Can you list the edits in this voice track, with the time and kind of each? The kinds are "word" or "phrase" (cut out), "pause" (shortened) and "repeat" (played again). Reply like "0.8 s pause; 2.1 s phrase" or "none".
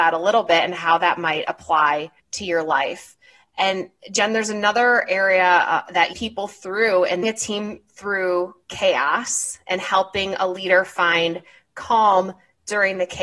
2.2 s pause; 6.1 s phrase; 7.2 s phrase